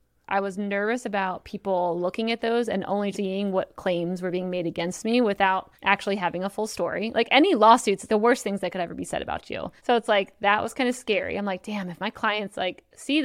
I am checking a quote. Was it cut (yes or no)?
yes